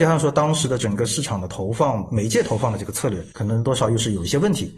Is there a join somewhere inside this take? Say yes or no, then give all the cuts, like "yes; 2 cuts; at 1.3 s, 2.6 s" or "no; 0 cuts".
yes; 1 cut; at 3.3 s